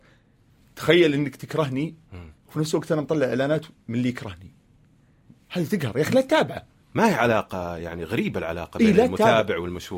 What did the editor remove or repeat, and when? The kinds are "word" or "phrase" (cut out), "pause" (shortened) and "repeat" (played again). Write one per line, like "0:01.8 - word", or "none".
0:02.4 - pause